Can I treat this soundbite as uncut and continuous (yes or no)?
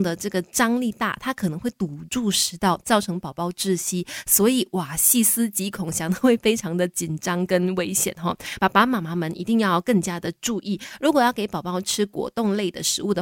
yes